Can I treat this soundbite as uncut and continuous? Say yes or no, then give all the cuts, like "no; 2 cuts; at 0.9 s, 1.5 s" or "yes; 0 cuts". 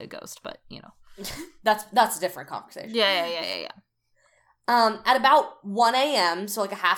yes; 0 cuts